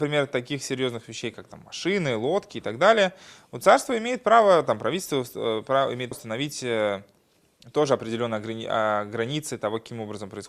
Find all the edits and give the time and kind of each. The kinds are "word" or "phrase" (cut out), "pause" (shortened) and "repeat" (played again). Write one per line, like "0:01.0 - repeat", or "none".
0:06.1 - word